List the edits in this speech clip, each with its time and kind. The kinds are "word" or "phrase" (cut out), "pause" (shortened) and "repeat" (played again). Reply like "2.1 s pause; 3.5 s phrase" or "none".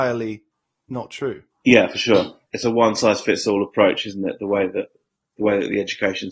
none